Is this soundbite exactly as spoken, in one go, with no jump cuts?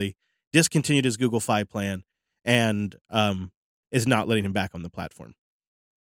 yes; 0 cuts

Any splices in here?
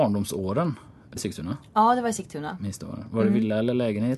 yes; 1 cut; at 1.2 s

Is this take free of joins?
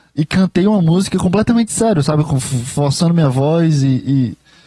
yes; 0 cuts

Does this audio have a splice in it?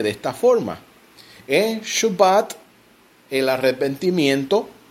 no; 0 cuts

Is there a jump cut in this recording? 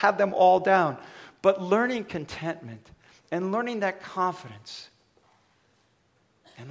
no; 0 cuts

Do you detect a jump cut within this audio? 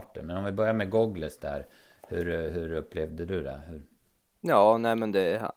no; 0 cuts

